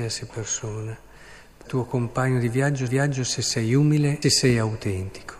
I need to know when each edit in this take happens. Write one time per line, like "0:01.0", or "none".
0:01.7
0:02.9
0:04.2